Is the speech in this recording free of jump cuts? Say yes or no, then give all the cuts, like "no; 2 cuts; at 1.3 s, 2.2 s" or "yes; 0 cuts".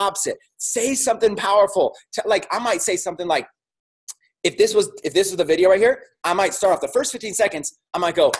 yes; 0 cuts